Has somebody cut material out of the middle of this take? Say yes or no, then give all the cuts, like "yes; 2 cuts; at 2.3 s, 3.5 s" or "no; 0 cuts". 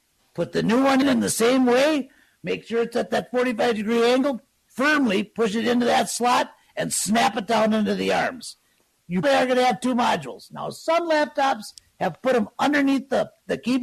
yes; 2 cuts; at 1.0 s, 9.2 s